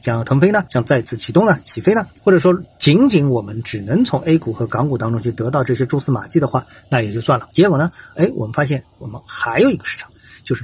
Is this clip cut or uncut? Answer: uncut